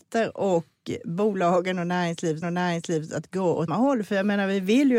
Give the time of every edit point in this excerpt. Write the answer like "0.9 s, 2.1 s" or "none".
2.4 s, 3.7 s

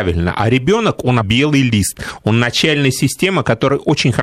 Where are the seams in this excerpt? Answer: 1.2 s

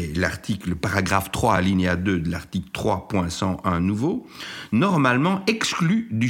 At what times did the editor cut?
none

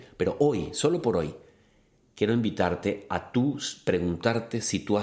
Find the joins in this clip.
none

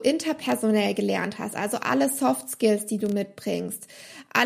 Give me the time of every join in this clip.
none

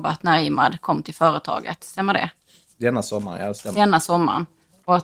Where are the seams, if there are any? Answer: none

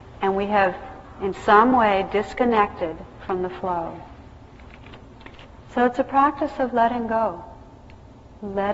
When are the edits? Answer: none

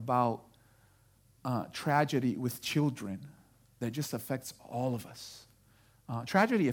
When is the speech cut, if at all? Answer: none

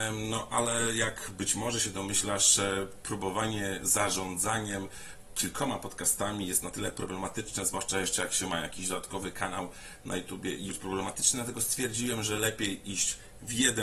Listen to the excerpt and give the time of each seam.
10.7 s

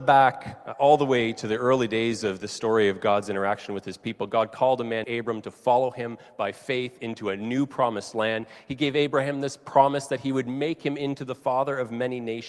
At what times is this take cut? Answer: 5.0 s

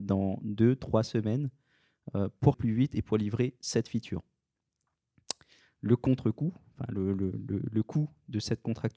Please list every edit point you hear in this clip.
2.5 s

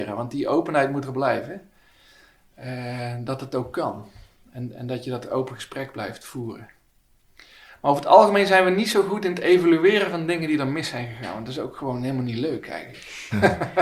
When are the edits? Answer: none

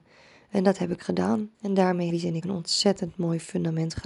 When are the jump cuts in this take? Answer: 1.5 s, 2.1 s, 2.4 s

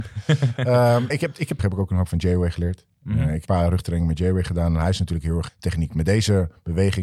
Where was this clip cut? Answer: 1.1 s, 1.6 s, 2.1 s, 3.4 s, 5.5 s

